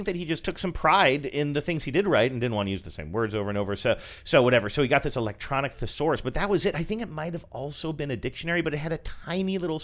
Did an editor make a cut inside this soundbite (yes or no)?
no